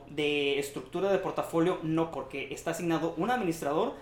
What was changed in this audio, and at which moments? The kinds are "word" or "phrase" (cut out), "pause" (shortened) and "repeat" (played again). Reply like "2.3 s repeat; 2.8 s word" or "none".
2.1 s phrase